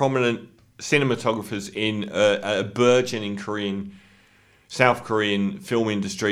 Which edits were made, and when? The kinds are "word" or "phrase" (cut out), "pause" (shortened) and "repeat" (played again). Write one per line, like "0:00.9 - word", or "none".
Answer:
none